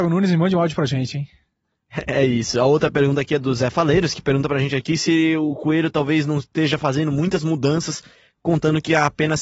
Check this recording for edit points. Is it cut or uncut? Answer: uncut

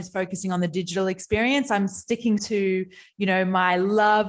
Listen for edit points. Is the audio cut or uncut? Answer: cut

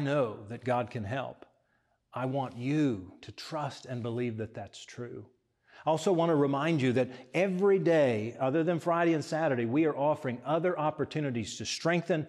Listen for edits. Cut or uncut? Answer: uncut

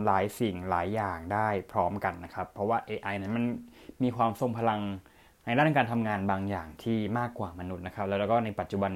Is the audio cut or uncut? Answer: uncut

